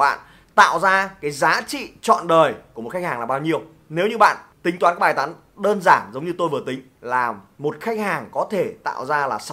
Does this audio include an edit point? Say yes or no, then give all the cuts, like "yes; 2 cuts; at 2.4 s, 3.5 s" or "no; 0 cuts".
yes; 1 cut; at 4.5 s